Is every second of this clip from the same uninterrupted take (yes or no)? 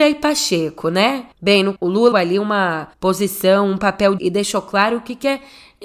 no